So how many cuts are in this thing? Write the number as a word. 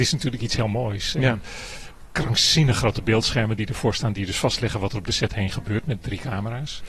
one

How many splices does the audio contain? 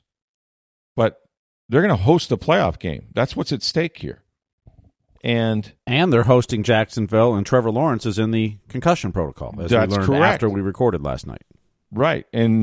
zero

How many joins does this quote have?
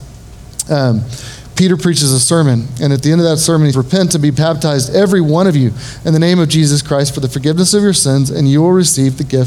one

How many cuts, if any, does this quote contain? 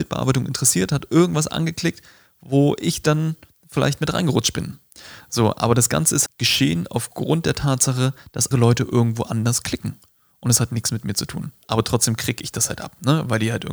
two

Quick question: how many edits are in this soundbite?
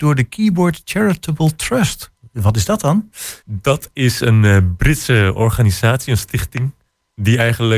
one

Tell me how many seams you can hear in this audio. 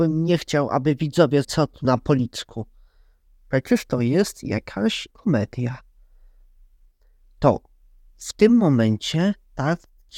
three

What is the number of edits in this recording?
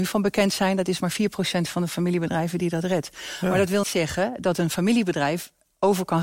one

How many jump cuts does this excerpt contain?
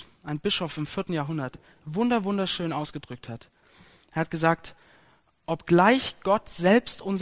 zero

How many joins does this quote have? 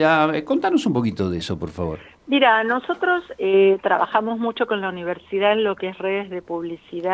zero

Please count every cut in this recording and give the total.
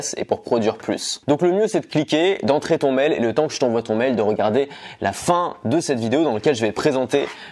zero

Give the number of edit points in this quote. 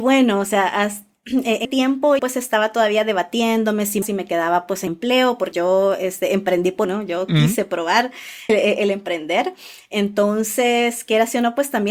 seven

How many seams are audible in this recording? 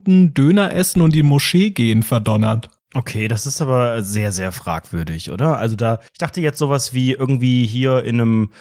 one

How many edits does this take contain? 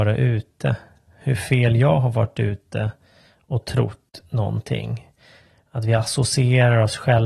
zero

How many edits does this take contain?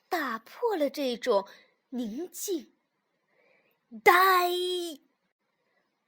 zero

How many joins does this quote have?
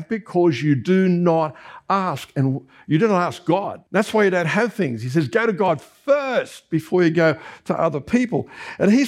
one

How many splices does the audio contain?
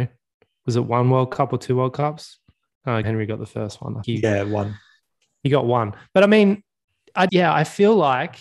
three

